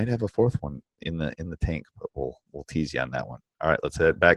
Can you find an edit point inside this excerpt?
no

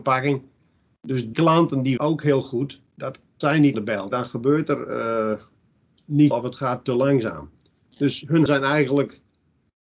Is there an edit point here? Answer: yes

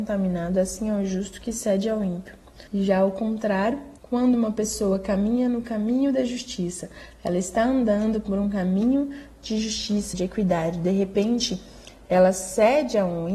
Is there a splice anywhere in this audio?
yes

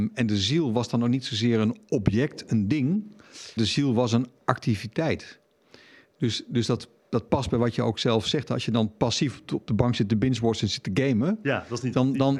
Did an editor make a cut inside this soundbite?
yes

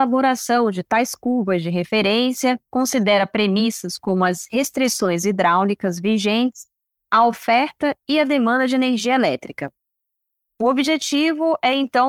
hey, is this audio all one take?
yes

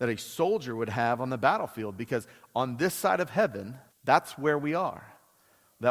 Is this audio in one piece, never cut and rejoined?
no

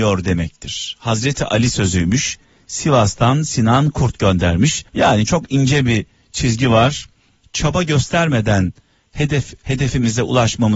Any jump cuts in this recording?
yes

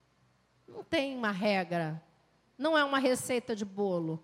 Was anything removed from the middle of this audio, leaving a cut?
no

